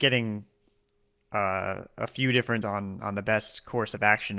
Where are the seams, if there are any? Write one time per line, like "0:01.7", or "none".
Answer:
0:02.6